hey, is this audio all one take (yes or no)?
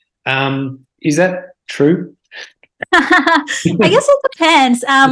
no